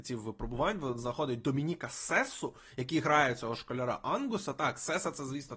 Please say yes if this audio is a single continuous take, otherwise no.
yes